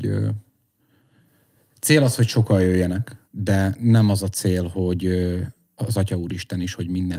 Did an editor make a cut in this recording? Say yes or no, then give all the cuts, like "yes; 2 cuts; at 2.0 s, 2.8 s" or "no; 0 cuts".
yes; 1 cut; at 3.2 s